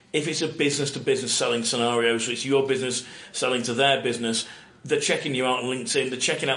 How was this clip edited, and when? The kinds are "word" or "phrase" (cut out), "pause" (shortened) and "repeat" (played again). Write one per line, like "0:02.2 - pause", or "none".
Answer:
none